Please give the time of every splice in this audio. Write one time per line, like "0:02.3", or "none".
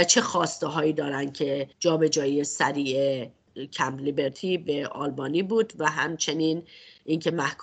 0:01.7